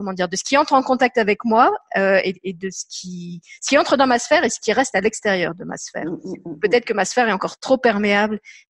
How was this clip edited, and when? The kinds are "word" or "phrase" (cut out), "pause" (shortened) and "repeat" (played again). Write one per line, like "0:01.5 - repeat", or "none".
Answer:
none